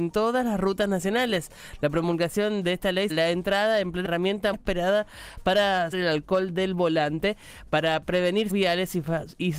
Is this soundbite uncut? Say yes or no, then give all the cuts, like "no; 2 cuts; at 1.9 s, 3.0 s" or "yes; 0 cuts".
no; 5 cuts; at 3.1 s, 4.0 s, 4.5 s, 5.9 s, 8.5 s